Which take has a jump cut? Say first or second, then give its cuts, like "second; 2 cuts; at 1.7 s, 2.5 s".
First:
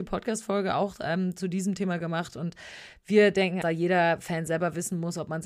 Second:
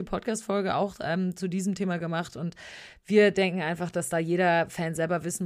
first; 1 cut; at 3.6 s